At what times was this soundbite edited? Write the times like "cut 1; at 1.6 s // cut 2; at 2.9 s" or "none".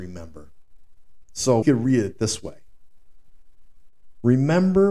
cut 1; at 1.6 s